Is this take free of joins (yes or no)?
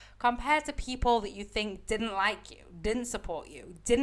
yes